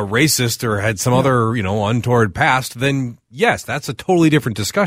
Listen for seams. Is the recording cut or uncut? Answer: uncut